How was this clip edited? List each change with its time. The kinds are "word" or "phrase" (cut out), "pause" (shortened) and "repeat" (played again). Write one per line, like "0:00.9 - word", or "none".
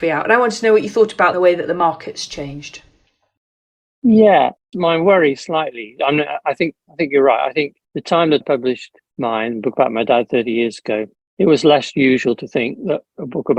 0:01.3 - phrase
0:04.7 - word
0:07.8 - pause
0:08.4 - word
0:09.1 - pause
0:11.1 - pause